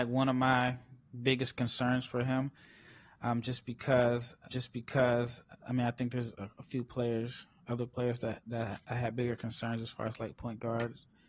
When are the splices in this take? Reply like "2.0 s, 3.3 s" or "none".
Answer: 4.5 s